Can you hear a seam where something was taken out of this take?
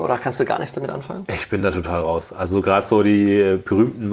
no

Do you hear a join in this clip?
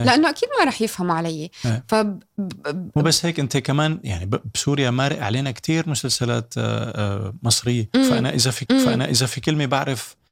yes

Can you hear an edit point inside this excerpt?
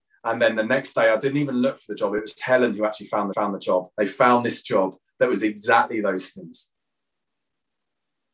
yes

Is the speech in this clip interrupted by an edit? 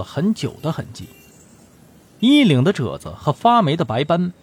no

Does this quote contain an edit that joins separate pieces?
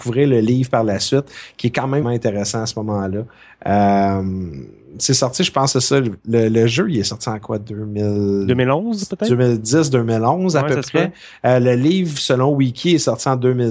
yes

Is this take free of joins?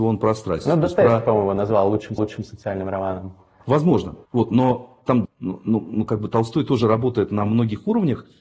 no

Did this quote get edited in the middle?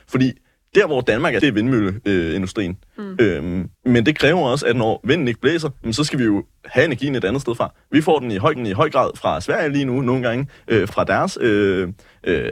yes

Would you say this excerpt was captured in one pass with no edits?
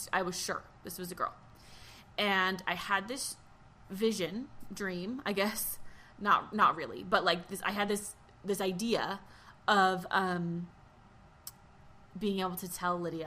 yes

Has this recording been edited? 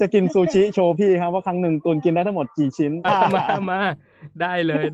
yes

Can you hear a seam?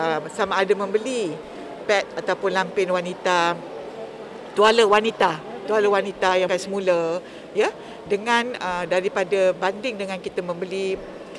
yes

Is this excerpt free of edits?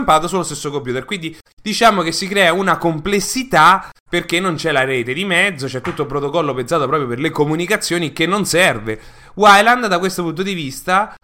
yes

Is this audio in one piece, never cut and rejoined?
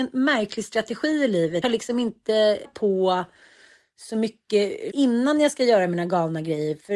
no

